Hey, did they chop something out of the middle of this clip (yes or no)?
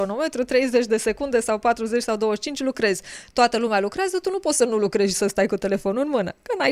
no